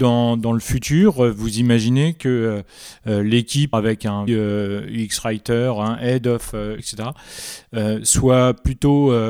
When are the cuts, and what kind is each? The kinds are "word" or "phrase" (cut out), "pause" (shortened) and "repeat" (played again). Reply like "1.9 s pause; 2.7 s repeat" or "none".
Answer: 3.7 s phrase; 4.3 s word; 6.8 s word

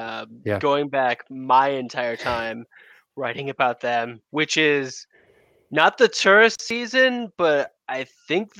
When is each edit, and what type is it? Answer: none

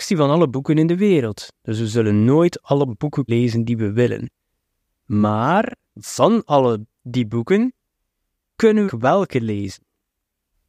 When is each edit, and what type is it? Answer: 3.3 s word; 5.8 s pause; 6.9 s pause; 8.9 s phrase

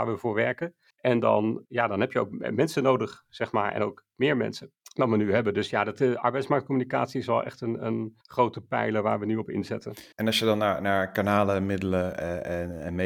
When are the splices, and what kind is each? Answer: 1.6 s word; 8.2 s pause; 10.1 s pause

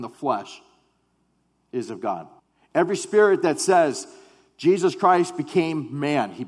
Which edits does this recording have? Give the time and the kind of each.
2.4 s pause

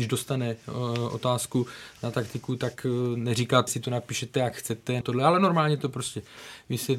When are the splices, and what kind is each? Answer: 3.7 s word; 5.0 s word

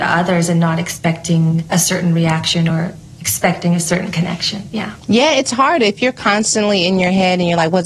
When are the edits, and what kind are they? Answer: none

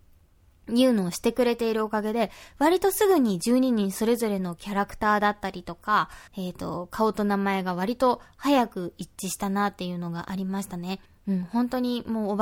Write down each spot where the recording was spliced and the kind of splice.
6.3 s pause; 11.0 s pause

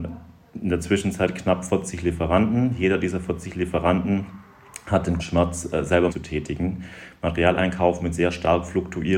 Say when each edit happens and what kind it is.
5.2 s word; 6.1 s word

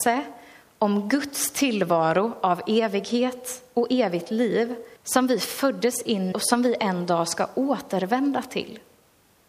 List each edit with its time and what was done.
5.0 s pause; 6.3 s word

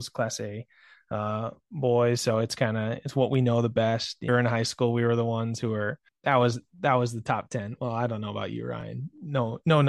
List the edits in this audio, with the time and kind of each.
4.3 s phrase; 6.1 s word

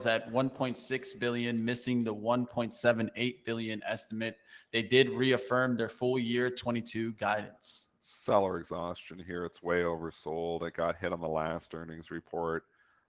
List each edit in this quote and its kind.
none

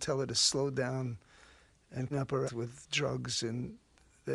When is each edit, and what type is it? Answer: 2.1 s word; 2.5 s word

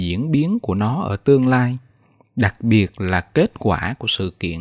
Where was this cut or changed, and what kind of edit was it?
none

